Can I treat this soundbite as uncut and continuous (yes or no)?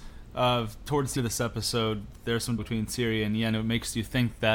no